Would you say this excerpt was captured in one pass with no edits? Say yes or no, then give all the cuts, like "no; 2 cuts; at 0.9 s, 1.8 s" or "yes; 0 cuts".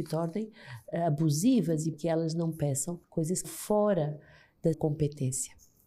no; 4 cuts; at 1.9 s, 3.0 s, 3.4 s, 4.7 s